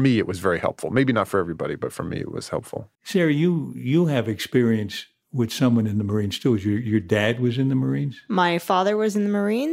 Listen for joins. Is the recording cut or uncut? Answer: cut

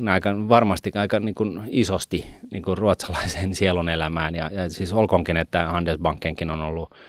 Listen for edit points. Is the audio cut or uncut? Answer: uncut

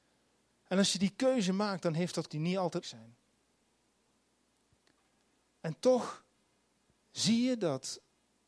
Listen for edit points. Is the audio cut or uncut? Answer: cut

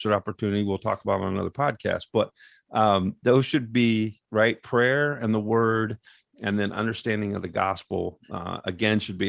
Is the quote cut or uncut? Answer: uncut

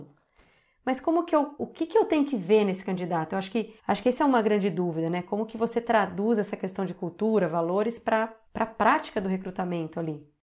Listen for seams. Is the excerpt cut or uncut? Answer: cut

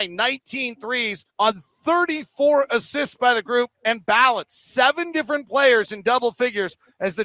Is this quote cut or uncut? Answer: cut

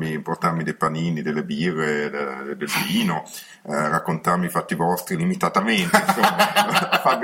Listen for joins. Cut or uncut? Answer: uncut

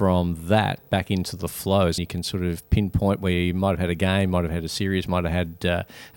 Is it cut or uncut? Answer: cut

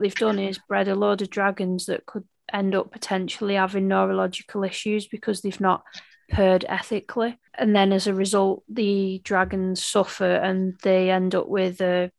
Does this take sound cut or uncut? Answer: uncut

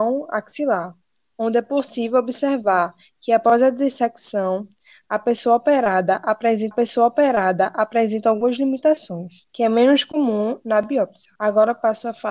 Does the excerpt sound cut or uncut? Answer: cut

